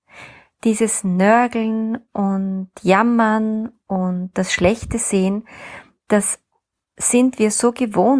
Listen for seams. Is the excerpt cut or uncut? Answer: uncut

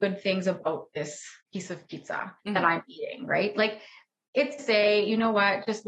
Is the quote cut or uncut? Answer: cut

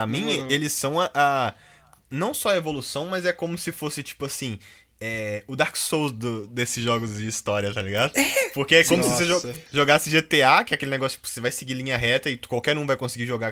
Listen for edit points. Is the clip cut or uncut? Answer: uncut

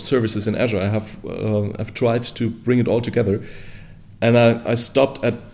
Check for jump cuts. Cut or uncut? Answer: uncut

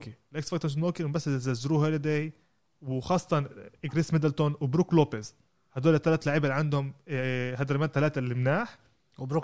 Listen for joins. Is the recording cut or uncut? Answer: uncut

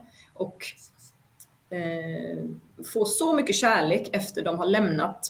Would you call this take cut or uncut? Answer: uncut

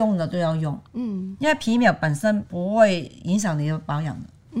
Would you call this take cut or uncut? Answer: uncut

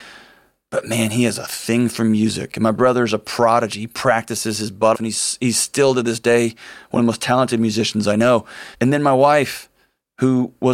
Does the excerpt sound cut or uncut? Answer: cut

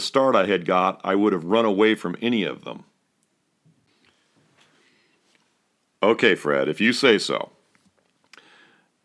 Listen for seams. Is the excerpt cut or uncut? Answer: uncut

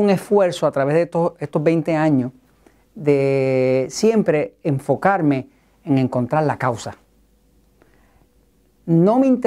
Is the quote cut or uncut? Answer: uncut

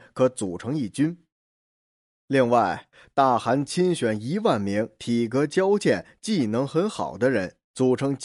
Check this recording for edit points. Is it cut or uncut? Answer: uncut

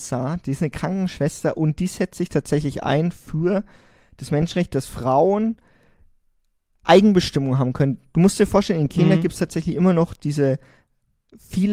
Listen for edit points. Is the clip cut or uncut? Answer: uncut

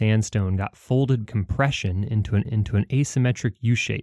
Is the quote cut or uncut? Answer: cut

